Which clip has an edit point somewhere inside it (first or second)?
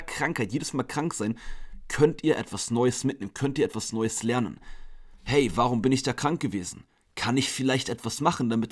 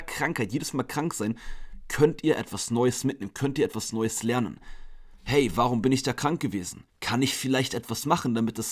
second